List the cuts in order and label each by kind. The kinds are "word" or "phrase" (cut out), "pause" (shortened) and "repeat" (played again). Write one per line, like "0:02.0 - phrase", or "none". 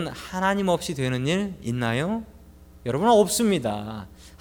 none

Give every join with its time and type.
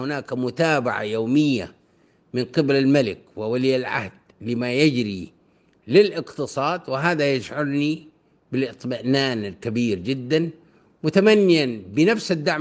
none

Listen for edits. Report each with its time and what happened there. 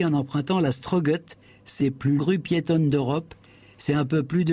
0:01.8 - word
0:02.2 - word

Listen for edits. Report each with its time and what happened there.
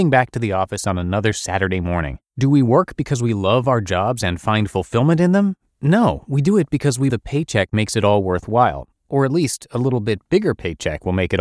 0:02.3 - pause
0:07.1 - word

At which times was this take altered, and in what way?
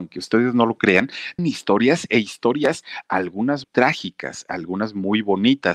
0:01.4 - word
0:03.6 - word

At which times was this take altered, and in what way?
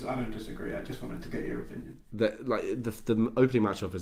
none

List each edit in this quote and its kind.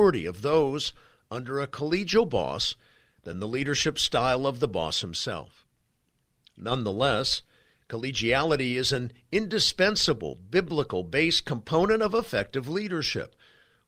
none

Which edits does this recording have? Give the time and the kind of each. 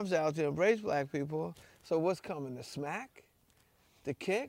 none

